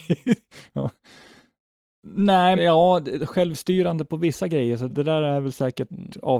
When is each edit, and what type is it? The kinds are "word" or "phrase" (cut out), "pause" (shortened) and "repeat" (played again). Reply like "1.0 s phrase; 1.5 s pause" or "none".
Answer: 2.6 s phrase; 4.9 s word